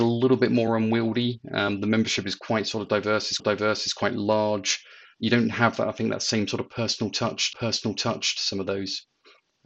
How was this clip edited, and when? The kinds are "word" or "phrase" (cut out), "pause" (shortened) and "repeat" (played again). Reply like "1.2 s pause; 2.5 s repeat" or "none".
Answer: 3.4 s repeat; 7.5 s repeat